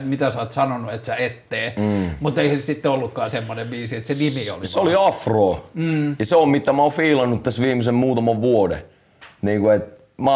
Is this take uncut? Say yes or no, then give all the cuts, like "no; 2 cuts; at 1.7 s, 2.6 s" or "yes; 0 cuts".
yes; 0 cuts